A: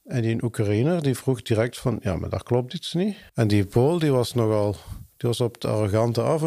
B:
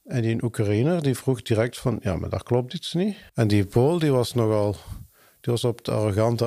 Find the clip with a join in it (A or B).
A